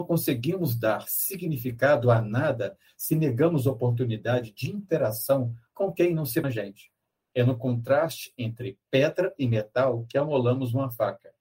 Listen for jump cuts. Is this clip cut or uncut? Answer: cut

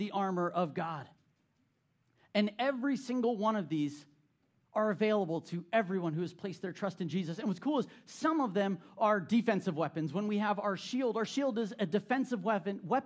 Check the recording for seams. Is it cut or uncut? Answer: uncut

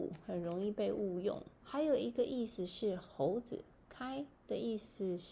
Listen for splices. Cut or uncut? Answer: cut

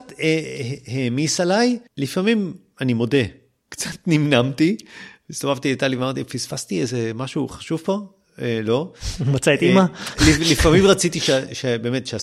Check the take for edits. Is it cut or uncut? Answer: cut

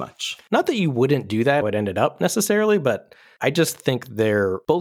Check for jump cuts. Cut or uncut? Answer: cut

